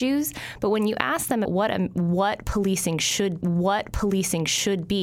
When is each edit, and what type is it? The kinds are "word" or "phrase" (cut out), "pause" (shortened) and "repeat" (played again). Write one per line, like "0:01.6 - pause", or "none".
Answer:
0:01.4 - word
0:03.4 - repeat